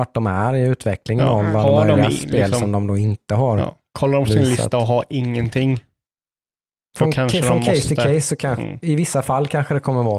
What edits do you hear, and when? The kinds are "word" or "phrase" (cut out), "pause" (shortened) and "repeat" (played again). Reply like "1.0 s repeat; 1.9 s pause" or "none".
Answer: none